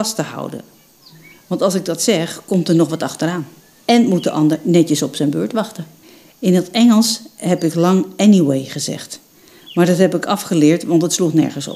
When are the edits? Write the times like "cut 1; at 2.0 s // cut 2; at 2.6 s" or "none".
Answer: cut 1; at 3.6 s // cut 2; at 6.0 s